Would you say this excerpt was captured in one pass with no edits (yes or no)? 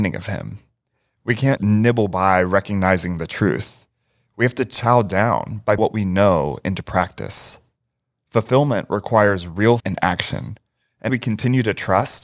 no